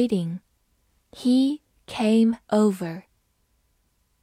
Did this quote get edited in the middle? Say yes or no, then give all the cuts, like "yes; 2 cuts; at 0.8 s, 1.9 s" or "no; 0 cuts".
yes; 1 cut; at 2.4 s